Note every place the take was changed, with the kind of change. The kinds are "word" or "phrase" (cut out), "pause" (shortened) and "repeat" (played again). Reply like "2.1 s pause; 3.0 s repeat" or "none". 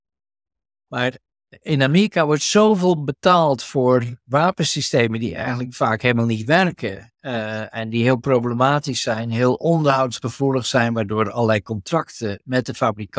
none